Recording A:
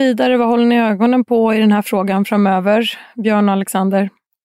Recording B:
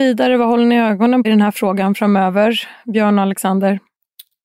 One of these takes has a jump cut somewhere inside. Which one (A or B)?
B